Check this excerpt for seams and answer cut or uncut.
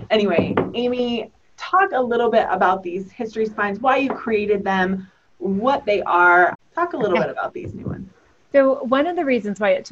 uncut